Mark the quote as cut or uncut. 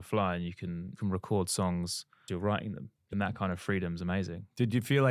cut